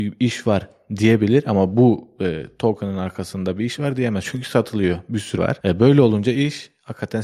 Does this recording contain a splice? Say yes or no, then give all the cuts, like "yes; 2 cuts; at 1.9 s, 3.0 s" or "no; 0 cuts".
yes; 1 cut; at 5.4 s